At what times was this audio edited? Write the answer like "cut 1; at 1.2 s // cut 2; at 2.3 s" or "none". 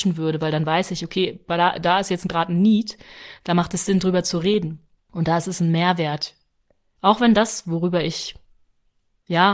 cut 1; at 5.0 s